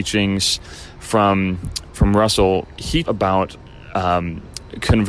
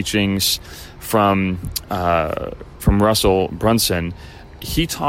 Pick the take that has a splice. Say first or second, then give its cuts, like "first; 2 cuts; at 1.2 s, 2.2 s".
first; 3 cuts; at 1.8 s, 2.6 s, 3.0 s